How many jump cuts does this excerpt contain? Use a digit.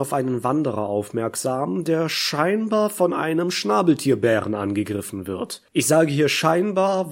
1